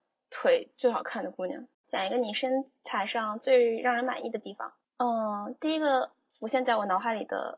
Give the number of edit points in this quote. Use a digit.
2